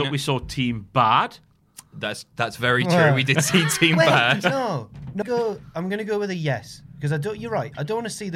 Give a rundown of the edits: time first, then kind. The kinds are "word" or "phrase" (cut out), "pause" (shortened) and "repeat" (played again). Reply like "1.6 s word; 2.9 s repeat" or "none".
5.2 s phrase